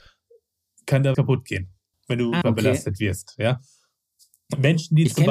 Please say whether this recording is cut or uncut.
cut